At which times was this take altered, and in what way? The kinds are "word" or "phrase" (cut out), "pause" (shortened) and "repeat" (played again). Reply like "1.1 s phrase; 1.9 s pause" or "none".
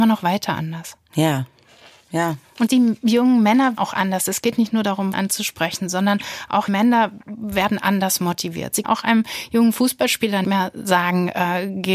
2.7 s word; 3.8 s word; 5.1 s word; 6.7 s word; 8.8 s word; 10.4 s word